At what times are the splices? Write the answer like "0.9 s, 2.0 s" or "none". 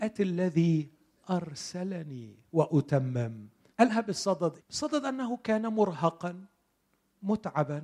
3.7 s, 4.6 s

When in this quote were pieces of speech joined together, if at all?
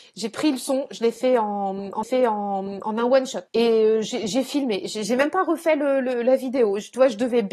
2.0 s, 3.5 s

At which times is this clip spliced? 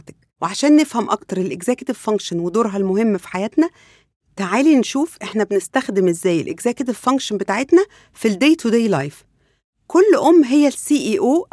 none

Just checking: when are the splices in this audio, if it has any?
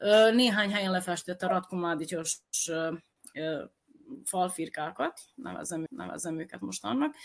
5.9 s

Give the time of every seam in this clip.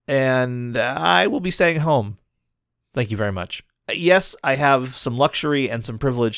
none

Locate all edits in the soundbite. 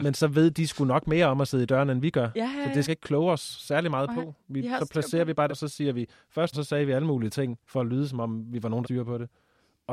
2.9 s, 5.5 s, 6.5 s, 7.6 s, 8.8 s

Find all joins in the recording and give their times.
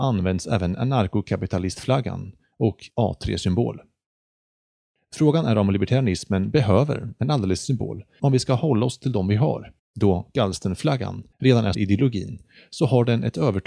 2.9 s, 7.6 s, 8.2 s, 9.8 s, 11.3 s, 11.7 s

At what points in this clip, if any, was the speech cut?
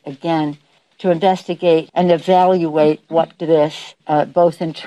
1.9 s, 3.4 s

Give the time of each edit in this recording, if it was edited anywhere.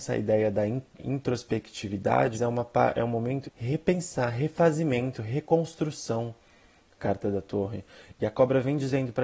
1.0 s, 2.3 s, 3.4 s, 7.0 s

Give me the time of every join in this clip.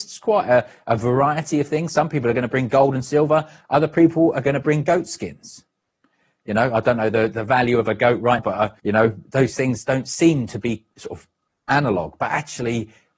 8.4 s, 8.8 s, 9.3 s, 10.9 s

